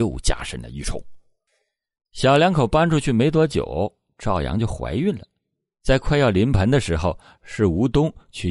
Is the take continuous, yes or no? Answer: yes